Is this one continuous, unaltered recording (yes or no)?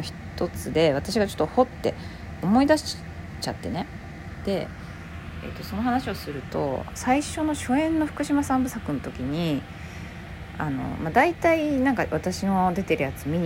no